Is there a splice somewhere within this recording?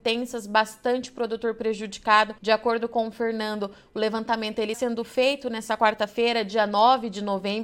yes; 2 cuts; at 2.4 s, 4.7 s

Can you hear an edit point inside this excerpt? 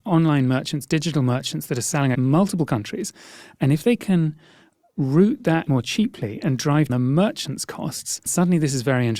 yes; 4 cuts; at 2.1 s, 5.7 s, 6.9 s, 8.3 s

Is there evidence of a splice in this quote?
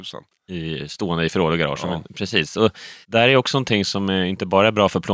yes; 1 cut; at 3.0 s

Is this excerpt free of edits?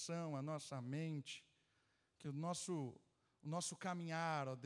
yes; 0 cuts

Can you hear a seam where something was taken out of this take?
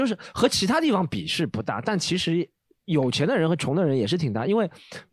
no; 0 cuts

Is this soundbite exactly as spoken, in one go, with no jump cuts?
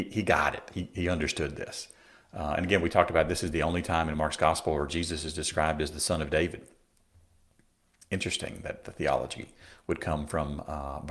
yes; 0 cuts

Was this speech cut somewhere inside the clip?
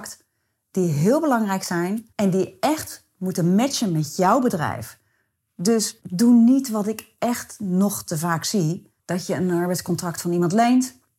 yes; 3 cuts; at 2.1 s, 6.0 s, 9.0 s

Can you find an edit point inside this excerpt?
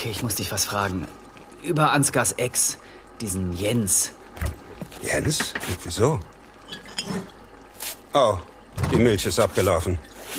no; 0 cuts

